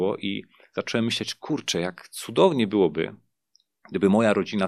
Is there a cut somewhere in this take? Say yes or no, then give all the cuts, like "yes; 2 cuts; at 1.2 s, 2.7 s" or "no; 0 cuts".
no; 0 cuts